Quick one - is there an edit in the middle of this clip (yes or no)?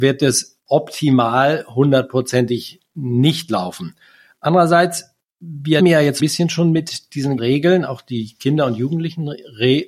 yes